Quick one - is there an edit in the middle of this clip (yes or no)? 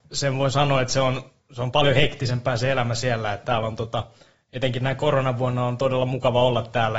no